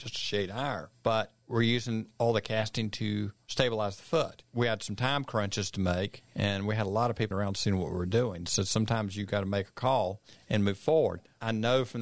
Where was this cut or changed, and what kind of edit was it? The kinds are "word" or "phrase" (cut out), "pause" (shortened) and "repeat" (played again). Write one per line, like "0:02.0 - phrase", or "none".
0:07.3 - word